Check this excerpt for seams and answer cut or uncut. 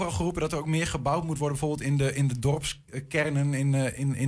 cut